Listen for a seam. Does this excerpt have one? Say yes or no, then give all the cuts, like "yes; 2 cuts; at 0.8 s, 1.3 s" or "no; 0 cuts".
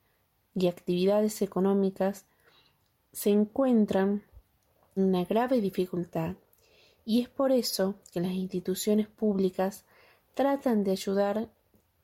yes; 1 cut; at 5.0 s